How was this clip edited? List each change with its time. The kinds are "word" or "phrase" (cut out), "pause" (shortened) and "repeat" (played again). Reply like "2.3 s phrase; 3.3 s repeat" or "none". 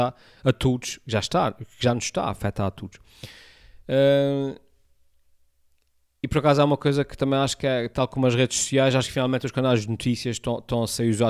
none